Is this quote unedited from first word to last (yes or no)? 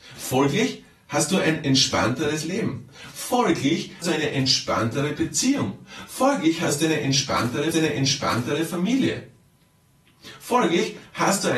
no